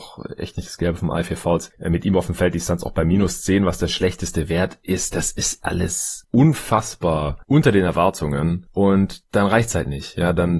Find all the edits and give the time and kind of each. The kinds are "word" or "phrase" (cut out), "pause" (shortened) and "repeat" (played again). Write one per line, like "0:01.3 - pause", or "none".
none